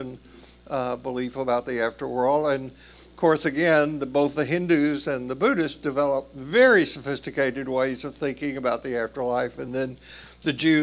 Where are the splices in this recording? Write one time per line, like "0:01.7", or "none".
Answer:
none